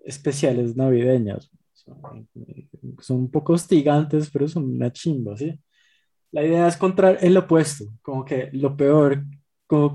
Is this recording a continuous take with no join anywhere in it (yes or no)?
yes